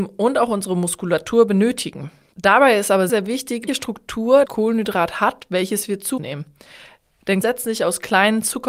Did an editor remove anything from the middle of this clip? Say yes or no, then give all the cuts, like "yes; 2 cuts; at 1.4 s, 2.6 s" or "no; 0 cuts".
yes; 5 cuts; at 3.1 s, 3.7 s, 4.5 s, 6.2 s, 7.4 s